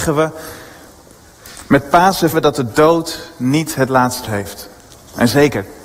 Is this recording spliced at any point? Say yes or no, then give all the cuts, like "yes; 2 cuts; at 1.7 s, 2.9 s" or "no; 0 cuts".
yes; 2 cuts; at 2.3 s, 4.2 s